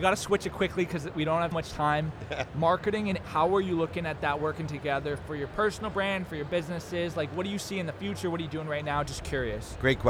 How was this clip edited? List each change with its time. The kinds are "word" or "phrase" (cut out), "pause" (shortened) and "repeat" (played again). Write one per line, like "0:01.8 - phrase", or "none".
0:01.5 - word
0:02.5 - word
0:03.2 - word